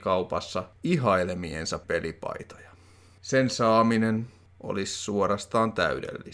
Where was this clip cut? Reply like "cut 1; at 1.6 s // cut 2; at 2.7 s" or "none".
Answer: cut 1; at 1.8 s